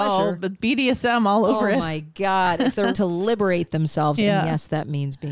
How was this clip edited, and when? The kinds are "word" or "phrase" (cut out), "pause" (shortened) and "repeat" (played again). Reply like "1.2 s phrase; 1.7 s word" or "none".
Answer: 2.9 s word